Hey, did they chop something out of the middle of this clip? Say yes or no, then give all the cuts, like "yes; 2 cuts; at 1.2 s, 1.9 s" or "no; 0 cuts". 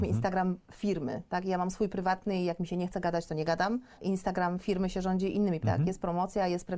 yes; 1 cut; at 5.6 s